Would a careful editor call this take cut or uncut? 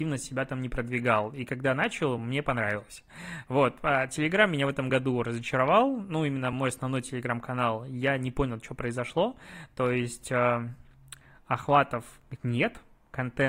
uncut